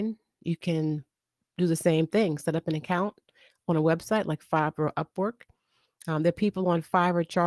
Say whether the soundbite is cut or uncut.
uncut